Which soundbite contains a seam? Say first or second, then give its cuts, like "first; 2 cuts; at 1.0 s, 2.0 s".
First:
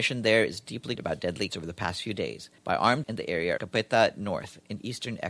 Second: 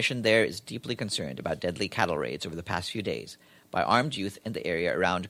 first; 5 cuts; at 1.0 s, 1.5 s, 2.6 s, 3.0 s, 3.6 s